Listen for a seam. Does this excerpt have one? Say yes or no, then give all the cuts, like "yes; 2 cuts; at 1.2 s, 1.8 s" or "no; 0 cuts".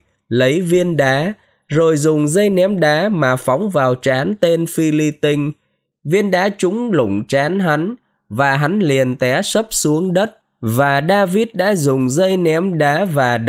no; 0 cuts